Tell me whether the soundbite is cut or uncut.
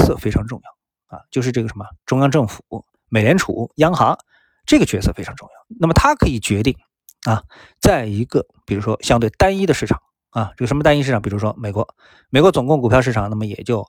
uncut